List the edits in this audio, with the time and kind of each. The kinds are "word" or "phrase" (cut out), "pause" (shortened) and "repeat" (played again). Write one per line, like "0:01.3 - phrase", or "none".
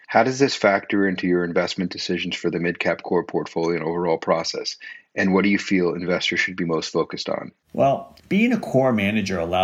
0:08.2 - pause

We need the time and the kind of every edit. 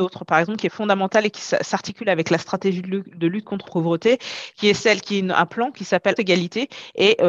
0:03.6 - word
0:06.2 - word

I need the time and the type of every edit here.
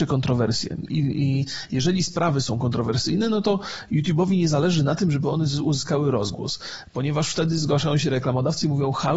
none

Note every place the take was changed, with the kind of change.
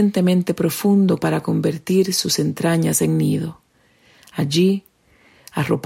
0:01.2 - word

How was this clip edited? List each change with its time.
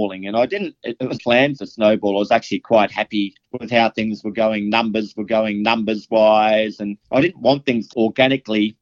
0:01.2 - phrase
0:01.6 - phrase
0:03.4 - pause
0:05.1 - repeat
0:07.0 - pause
0:07.9 - phrase

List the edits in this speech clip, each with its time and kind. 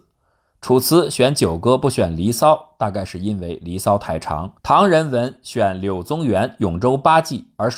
0:04.6 - pause

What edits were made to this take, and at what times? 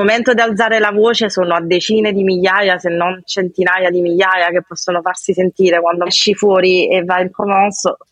0:06.1 - phrase

